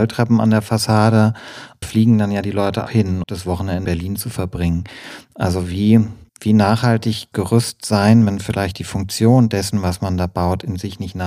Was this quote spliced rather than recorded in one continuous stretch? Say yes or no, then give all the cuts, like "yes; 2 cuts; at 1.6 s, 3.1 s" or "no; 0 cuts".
yes; 6 cuts; at 1.8 s, 2.9 s, 3.2 s, 3.8 s, 6.3 s, 7.3 s